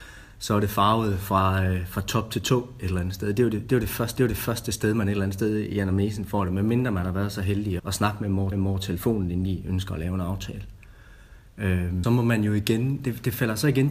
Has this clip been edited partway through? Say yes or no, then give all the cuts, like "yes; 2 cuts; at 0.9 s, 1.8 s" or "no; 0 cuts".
yes; 4 cuts; at 4.2 s, 7.8 s, 8.5 s, 12.0 s